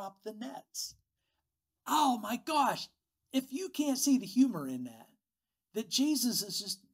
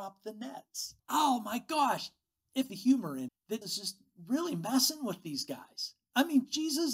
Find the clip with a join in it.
second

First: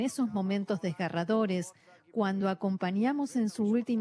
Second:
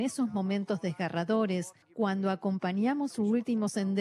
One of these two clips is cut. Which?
second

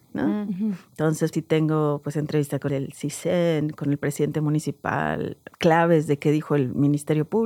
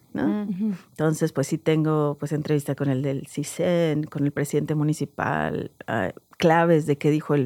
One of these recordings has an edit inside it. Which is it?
first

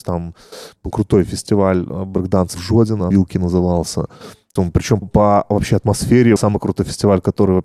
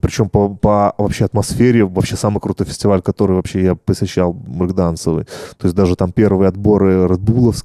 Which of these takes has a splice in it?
first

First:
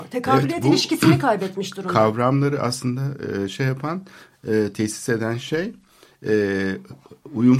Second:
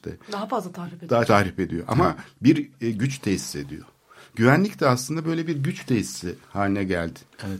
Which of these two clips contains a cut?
second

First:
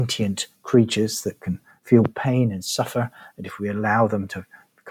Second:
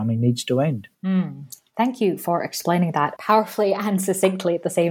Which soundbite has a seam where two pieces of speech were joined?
second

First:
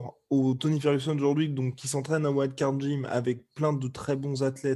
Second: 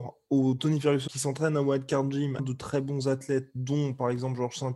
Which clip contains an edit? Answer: second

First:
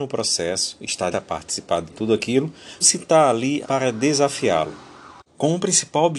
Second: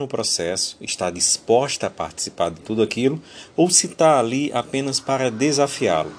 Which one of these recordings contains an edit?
first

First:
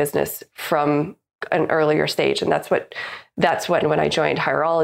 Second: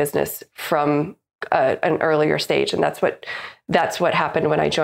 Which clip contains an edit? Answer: first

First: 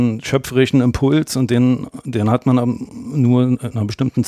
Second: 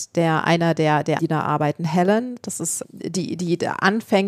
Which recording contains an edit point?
second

